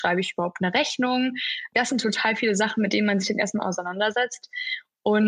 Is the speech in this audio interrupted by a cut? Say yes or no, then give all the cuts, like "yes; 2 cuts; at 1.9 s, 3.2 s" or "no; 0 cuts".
no; 0 cuts